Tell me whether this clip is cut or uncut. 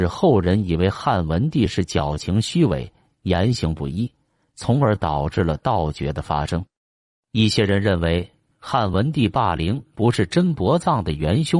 uncut